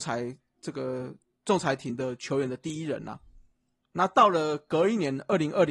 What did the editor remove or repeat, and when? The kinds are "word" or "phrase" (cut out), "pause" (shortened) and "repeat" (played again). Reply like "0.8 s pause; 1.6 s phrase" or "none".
none